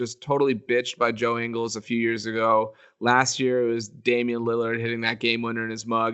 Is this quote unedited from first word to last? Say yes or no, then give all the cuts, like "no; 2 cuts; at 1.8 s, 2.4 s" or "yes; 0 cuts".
yes; 0 cuts